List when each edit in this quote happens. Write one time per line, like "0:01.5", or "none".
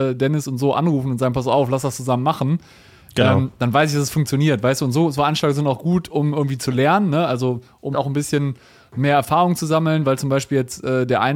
0:07.9

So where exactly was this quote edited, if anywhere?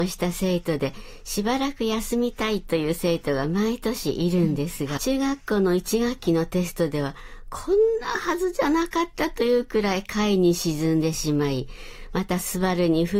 0:05.0

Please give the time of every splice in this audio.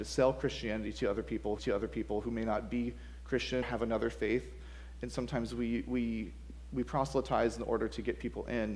0:01.6
0:03.6

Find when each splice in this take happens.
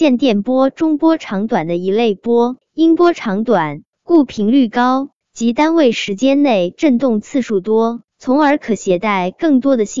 0:02.6
0:03.9
0:05.2
0:08.1

